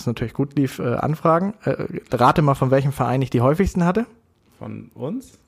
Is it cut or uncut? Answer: uncut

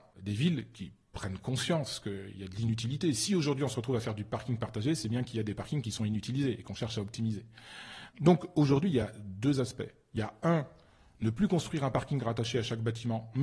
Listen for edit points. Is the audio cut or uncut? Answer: uncut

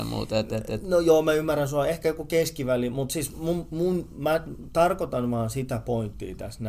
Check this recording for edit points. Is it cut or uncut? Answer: uncut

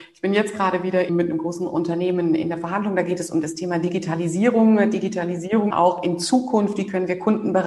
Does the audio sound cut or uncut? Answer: cut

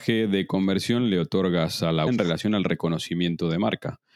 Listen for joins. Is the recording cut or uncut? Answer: cut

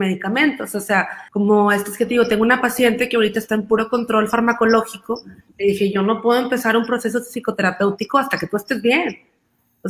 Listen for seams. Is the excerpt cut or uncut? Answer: cut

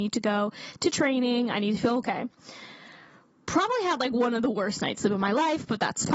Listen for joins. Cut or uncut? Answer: uncut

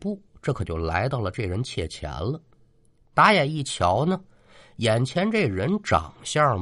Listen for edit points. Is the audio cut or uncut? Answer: uncut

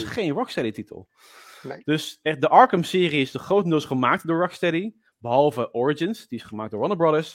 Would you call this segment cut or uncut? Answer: uncut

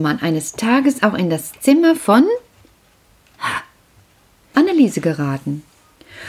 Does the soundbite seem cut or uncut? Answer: cut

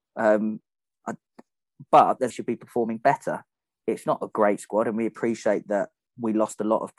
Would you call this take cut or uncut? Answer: cut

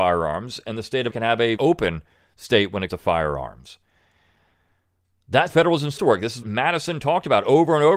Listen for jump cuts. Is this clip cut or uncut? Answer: cut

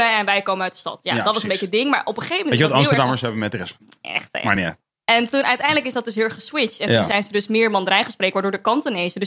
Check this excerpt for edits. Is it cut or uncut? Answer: uncut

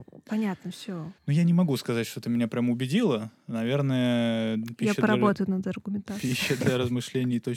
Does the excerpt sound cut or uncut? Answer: cut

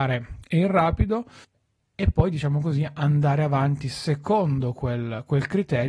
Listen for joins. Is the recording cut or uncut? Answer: cut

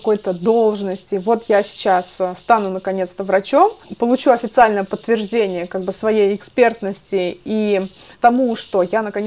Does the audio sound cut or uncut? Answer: uncut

